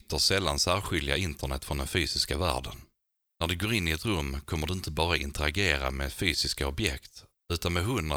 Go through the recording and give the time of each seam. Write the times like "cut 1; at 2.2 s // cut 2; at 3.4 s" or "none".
none